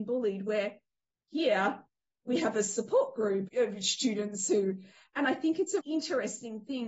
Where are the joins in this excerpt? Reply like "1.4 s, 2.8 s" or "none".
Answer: 3.5 s, 5.8 s